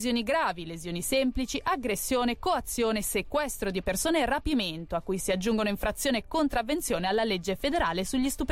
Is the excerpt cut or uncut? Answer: uncut